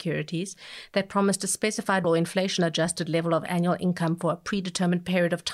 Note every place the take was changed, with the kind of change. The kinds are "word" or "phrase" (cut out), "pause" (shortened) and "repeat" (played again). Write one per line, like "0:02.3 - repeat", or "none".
0:02.0 - word